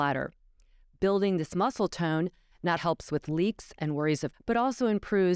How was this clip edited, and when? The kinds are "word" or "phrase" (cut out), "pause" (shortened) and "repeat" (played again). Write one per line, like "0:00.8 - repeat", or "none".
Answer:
0:02.8 - word
0:04.3 - word